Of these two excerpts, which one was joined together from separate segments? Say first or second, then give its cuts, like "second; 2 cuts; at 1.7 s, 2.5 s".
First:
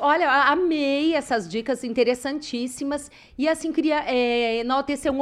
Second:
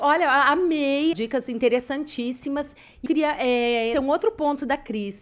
second; 3 cuts; at 1.1 s, 3.1 s, 3.9 s